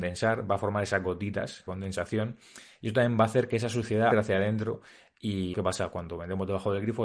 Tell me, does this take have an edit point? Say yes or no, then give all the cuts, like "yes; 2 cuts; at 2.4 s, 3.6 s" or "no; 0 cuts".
yes; 3 cuts; at 1.7 s, 4.1 s, 5.5 s